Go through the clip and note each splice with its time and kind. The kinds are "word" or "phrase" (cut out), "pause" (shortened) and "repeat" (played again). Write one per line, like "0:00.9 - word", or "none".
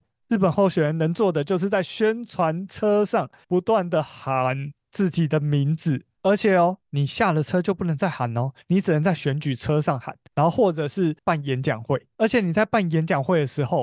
0:10.3 - pause
0:11.2 - pause